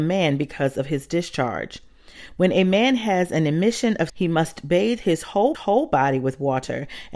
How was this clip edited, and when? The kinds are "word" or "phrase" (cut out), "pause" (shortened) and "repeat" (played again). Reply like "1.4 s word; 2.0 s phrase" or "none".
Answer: 4.1 s word; 5.5 s repeat